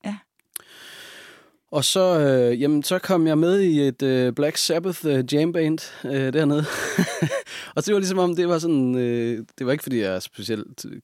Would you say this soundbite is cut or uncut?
uncut